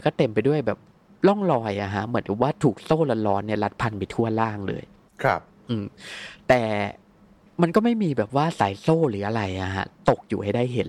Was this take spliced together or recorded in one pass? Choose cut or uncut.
uncut